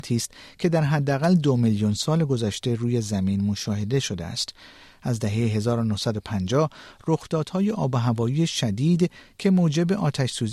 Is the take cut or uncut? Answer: uncut